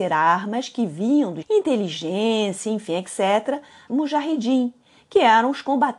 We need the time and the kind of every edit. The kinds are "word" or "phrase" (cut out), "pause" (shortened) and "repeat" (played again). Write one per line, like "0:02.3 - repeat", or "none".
0:01.4 - word
0:03.9 - word